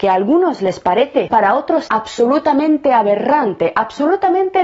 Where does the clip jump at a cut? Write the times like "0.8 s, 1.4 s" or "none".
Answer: 1.3 s, 1.9 s